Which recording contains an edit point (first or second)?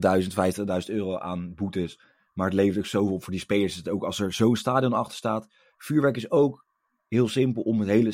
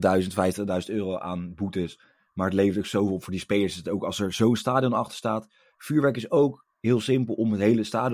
second